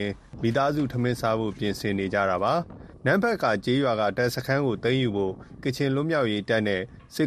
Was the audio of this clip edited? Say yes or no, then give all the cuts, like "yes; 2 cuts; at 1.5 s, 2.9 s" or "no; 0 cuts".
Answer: yes; 1 cut; at 5.6 s